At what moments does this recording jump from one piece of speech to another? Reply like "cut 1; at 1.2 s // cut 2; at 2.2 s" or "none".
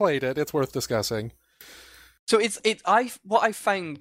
none

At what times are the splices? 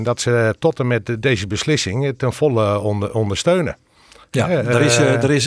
none

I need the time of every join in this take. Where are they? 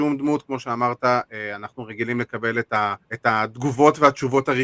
cut 1; at 3.0 s

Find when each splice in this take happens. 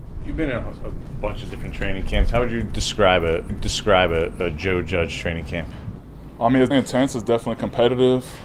cut 1; at 3.5 s // cut 2; at 6.7 s

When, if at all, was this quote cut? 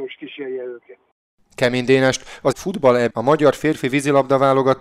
cut 1; at 2.5 s // cut 2; at 3.1 s

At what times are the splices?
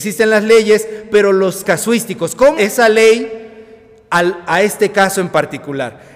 cut 1; at 1.6 s // cut 2; at 2.6 s

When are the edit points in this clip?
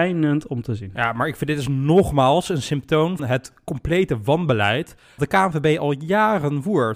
cut 1; at 3.2 s // cut 2; at 5.2 s

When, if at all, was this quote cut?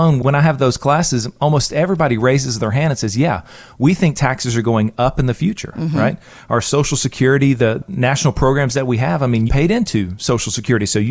cut 1; at 9.5 s

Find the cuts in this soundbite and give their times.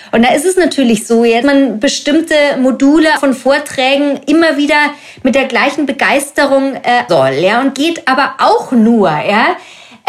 cut 1; at 1.4 s // cut 2; at 3.2 s // cut 3; at 7.1 s // cut 4; at 7.7 s

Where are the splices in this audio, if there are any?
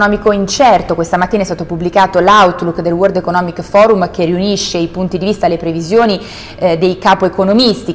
none

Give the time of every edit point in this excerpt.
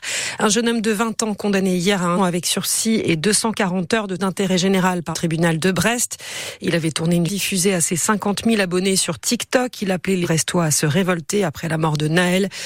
cut 1; at 2.2 s // cut 2; at 4.2 s // cut 3; at 5.1 s // cut 4; at 7.3 s // cut 5; at 10.2 s

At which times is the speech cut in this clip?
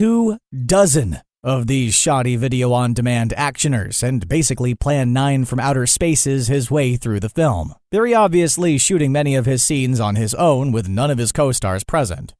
none

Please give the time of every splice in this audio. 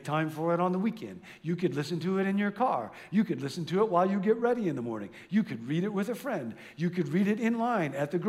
none

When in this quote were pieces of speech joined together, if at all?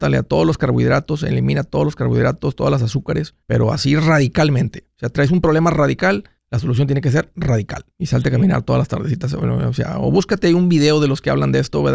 cut 1; at 3.4 s // cut 2; at 6.4 s // cut 3; at 7.9 s

